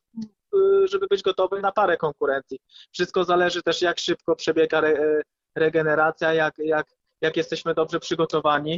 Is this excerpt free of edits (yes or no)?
yes